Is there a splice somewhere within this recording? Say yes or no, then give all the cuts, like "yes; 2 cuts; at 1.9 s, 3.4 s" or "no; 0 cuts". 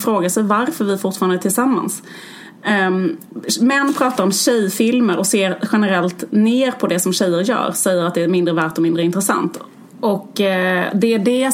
no; 0 cuts